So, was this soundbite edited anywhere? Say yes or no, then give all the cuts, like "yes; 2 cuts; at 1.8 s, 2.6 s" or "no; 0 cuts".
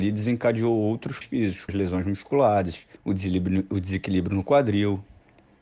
yes; 3 cuts; at 1.2 s, 1.7 s, 3.0 s